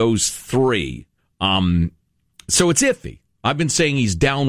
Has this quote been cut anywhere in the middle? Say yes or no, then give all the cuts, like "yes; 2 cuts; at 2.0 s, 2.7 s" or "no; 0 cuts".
yes; 1 cut; at 1.2 s